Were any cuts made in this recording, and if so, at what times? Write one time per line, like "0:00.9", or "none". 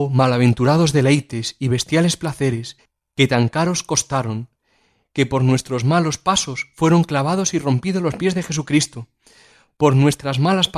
none

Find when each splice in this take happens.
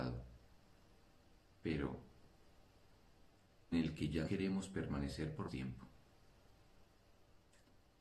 0:03.7
0:04.3
0:05.5

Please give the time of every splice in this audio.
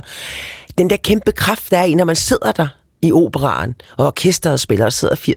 none

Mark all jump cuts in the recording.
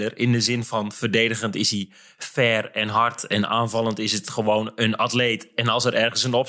none

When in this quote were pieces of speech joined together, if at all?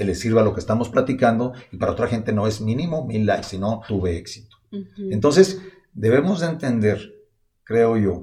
0:03.9

